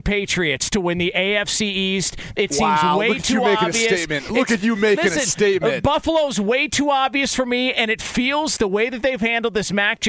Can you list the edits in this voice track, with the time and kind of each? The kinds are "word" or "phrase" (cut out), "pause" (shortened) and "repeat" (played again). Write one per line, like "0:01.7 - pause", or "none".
0:08.6 - word